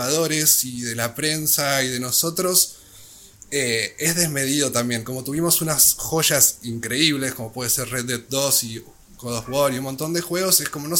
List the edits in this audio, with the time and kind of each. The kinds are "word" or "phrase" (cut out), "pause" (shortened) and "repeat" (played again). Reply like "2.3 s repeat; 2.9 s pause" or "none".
none